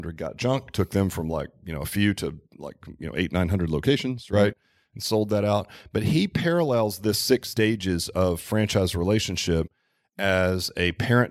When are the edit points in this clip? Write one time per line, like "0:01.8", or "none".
none

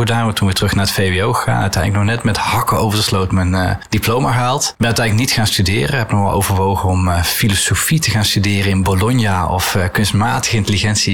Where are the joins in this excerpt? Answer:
none

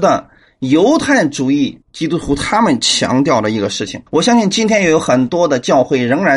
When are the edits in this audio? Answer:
0:01.8
0:04.1

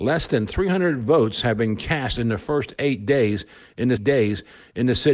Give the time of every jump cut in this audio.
0:04.0

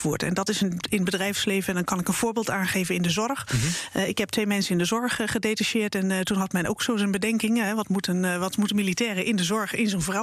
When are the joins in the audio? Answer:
none

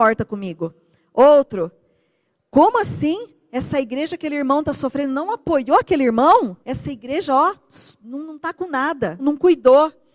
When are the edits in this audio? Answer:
0:06.6
0:09.2

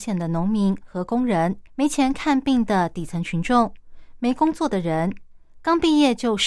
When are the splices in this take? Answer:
0:01.7

